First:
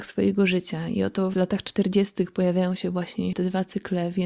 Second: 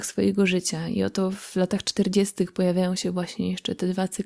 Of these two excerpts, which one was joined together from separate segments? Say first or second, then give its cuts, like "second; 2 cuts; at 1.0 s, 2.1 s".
first; 2 cuts; at 1.3 s, 3.3 s